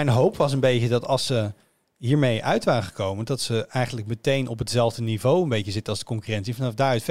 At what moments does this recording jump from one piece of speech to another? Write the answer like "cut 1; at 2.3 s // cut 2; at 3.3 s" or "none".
none

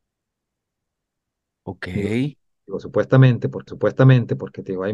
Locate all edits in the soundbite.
cut 1; at 3.7 s

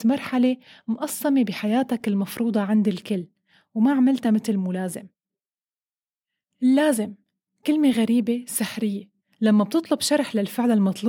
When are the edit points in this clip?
none

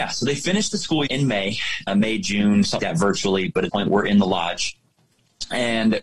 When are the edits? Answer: cut 1; at 1.1 s // cut 2; at 1.9 s // cut 3; at 2.8 s // cut 4; at 3.7 s

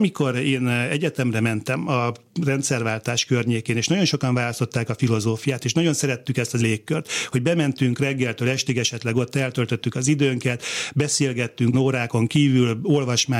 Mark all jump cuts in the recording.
cut 1; at 6.6 s // cut 2; at 11.7 s

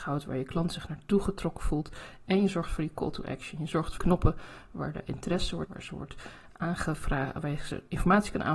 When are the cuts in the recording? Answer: cut 1; at 4.0 s // cut 2; at 5.7 s

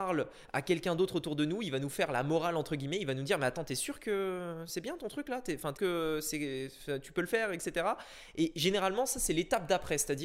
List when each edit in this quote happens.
cut 1; at 5.8 s

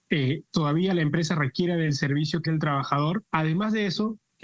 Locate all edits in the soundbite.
cut 1; at 2.5 s

